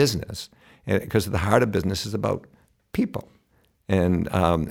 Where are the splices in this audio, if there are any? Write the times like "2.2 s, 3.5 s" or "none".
none